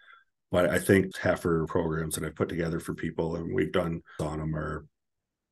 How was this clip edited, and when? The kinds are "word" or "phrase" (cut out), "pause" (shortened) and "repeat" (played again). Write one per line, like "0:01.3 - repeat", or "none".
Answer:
0:01.1 - word
0:01.7 - word
0:04.2 - word